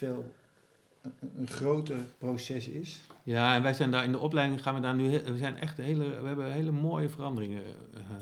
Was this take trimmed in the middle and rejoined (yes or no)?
yes